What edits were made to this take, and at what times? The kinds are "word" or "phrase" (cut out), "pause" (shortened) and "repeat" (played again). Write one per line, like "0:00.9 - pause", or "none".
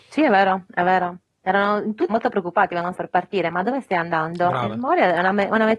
0:01.2 - pause
0:02.1 - word
0:02.9 - word